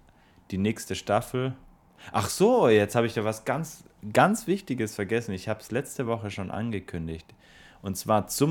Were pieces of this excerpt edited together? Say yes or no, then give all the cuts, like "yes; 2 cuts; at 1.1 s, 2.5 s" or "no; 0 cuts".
no; 0 cuts